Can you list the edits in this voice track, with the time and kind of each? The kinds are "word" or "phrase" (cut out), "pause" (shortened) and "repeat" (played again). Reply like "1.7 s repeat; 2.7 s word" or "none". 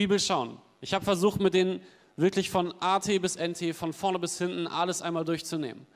none